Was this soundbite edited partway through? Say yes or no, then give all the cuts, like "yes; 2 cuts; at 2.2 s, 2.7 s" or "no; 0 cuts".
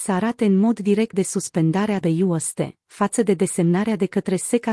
yes; 2 cuts; at 1.1 s, 2.0 s